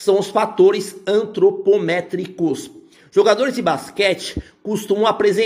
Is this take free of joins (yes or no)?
yes